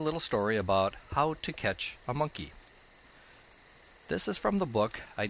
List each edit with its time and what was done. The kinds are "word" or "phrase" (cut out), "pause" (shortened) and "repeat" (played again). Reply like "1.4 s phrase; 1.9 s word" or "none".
4.0 s pause